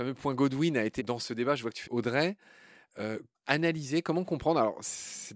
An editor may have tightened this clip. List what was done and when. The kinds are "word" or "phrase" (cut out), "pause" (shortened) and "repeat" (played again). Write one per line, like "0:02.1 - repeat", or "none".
0:01.0 - word
0:01.9 - phrase
0:03.3 - word